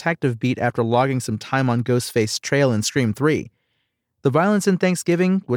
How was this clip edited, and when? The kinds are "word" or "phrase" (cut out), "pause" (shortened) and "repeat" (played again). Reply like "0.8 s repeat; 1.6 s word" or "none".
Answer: none